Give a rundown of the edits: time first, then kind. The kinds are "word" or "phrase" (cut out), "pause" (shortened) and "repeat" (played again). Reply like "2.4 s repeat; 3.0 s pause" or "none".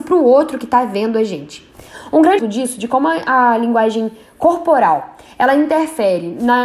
2.4 s word